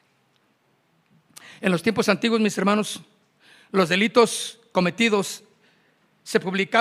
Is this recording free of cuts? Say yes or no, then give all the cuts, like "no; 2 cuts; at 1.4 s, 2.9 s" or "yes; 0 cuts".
yes; 0 cuts